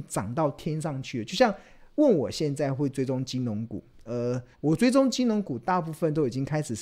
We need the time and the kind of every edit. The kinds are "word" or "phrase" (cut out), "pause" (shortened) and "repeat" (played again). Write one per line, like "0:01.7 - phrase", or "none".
0:04.5 - pause